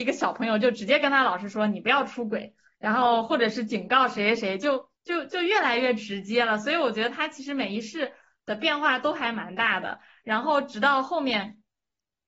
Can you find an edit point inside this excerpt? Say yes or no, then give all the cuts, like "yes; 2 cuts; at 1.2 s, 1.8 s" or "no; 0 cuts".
no; 0 cuts